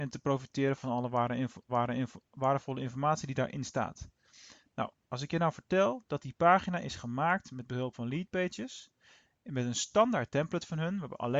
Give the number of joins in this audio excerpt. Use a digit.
1